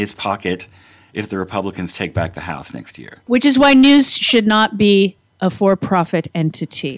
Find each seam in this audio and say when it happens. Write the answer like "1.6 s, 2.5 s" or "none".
none